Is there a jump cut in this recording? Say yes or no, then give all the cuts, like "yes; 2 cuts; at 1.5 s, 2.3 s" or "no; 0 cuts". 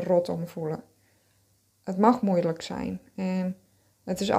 no; 0 cuts